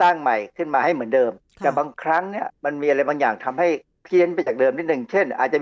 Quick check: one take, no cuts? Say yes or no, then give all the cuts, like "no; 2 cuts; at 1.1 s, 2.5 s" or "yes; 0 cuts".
yes; 0 cuts